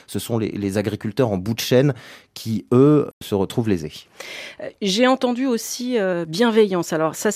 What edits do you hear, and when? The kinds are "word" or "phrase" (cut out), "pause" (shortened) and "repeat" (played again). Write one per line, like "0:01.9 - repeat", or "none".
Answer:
none

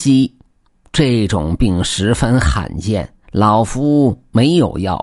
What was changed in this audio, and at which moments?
0:03.2 - pause

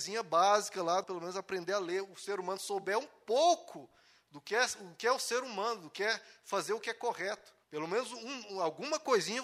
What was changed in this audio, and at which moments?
0:01.0 - phrase
0:07.6 - pause

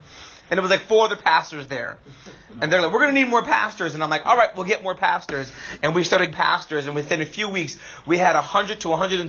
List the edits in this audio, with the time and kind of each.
0:06.3 - word

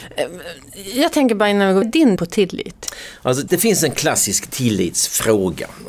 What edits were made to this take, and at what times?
0:01.8 - phrase
0:02.2 - word
0:03.5 - word

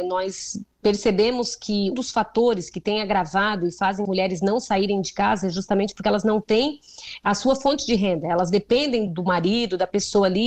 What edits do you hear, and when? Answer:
0:01.9 - word
0:04.0 - word
0:09.1 - word

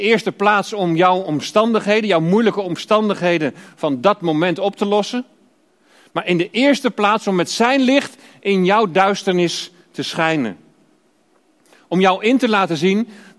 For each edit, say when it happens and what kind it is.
none

